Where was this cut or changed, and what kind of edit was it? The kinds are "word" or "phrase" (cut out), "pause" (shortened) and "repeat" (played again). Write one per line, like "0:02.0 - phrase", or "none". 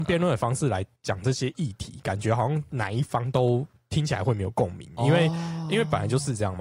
none